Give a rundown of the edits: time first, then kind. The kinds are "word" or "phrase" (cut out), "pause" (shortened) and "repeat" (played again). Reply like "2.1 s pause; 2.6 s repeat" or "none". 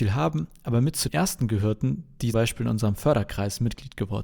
1.1 s word; 2.3 s word